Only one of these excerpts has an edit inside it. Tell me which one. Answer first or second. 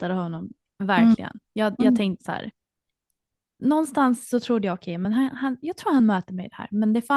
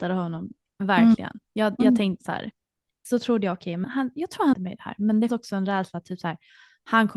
second